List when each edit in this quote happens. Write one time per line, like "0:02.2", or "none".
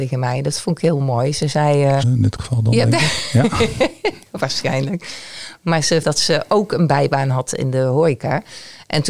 0:02.0
0:06.0